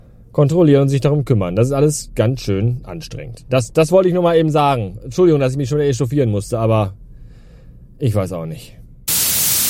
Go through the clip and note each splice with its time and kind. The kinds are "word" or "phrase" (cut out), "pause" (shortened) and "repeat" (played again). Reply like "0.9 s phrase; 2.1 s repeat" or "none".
none